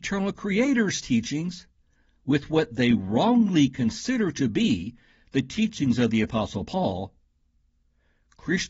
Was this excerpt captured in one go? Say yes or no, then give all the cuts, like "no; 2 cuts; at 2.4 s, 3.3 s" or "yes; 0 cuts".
yes; 0 cuts